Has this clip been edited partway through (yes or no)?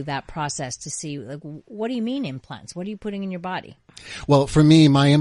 no